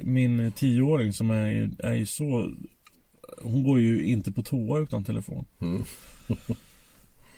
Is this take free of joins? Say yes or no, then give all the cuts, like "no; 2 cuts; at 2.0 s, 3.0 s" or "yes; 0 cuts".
yes; 0 cuts